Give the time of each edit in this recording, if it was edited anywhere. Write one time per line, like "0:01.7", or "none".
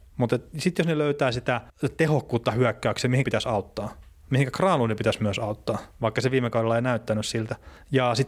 0:01.7
0:03.2
0:05.9